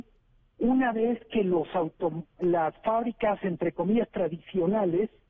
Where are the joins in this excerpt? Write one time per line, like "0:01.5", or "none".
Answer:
none